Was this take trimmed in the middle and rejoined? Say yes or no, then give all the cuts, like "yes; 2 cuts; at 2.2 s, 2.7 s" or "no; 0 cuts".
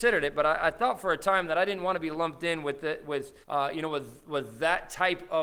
yes; 1 cut; at 3.4 s